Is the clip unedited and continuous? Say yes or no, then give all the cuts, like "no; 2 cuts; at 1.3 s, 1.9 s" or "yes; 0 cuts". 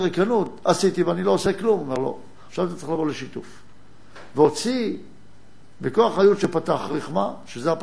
yes; 0 cuts